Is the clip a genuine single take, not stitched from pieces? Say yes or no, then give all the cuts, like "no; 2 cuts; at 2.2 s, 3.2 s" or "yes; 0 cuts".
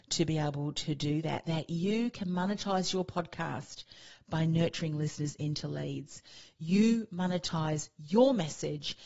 no; 1 cut; at 1.4 s